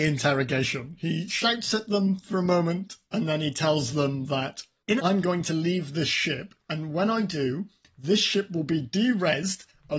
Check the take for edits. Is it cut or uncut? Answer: cut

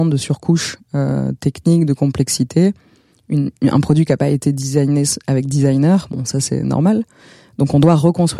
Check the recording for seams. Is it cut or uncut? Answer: uncut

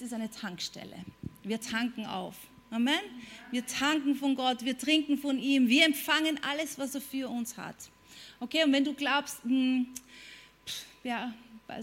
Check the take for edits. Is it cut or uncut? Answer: uncut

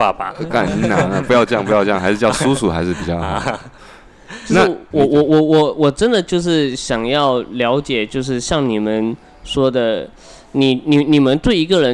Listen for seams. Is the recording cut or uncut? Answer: cut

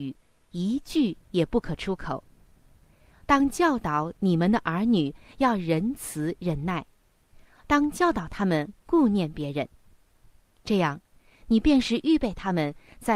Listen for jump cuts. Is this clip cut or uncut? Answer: uncut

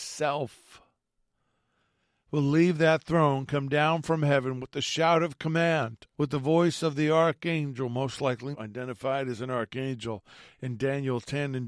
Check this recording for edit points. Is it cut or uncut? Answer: cut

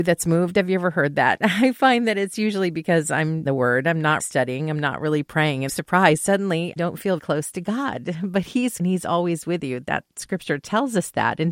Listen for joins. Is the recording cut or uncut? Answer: cut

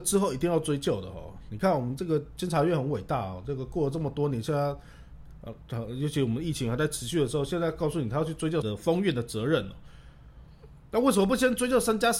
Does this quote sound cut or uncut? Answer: cut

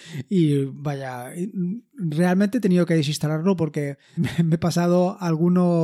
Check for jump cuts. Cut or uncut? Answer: cut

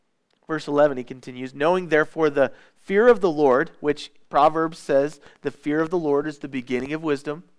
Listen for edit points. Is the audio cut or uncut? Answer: uncut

